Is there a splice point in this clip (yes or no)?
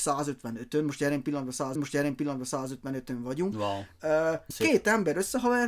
yes